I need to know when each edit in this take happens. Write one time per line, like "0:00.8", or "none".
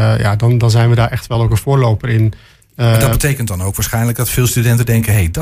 none